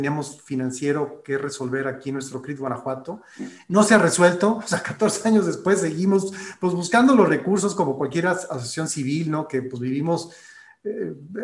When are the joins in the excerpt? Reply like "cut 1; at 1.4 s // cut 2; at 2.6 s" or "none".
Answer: none